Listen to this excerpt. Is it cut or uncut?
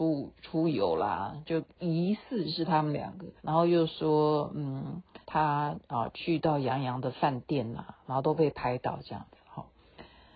cut